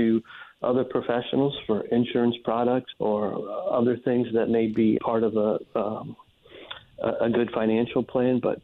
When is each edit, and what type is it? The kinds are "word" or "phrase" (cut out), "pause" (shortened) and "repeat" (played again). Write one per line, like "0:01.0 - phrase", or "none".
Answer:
0:02.9 - word
0:05.0 - word